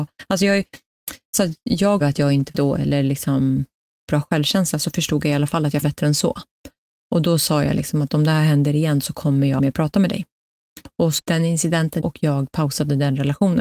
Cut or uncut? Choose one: cut